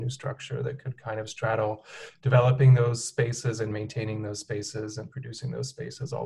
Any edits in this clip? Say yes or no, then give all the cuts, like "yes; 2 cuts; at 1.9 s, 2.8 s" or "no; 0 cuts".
no; 0 cuts